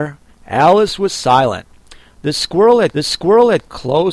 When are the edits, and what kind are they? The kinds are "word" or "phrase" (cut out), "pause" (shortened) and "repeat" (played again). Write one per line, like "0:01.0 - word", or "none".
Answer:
0:02.9 - repeat